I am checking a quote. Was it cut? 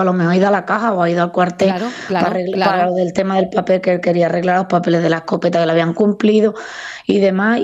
no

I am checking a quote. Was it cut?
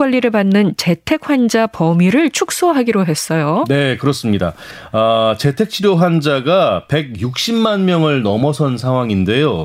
no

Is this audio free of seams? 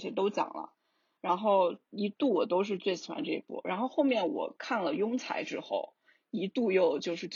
yes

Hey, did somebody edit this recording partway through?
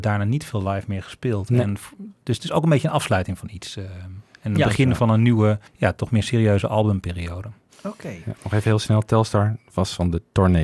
yes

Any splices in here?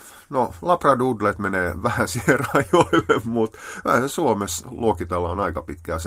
no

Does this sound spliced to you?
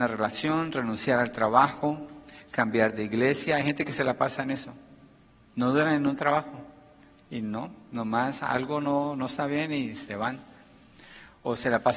no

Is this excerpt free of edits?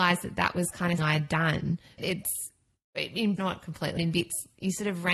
no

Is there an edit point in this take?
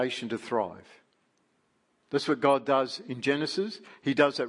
no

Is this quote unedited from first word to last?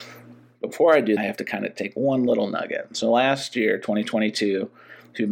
no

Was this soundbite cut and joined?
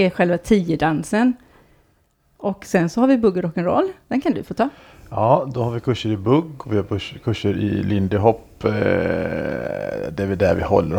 no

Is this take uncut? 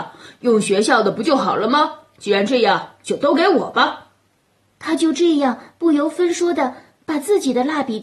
yes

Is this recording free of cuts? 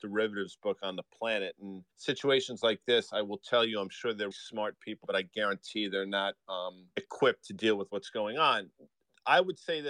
no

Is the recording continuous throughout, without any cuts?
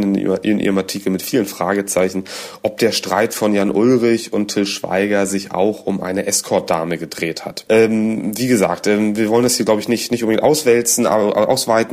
yes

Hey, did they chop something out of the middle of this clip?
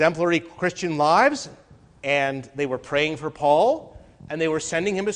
no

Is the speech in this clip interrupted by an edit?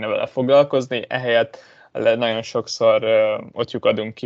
no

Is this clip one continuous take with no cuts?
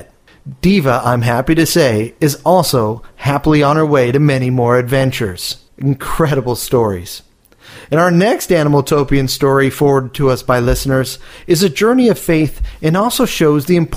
no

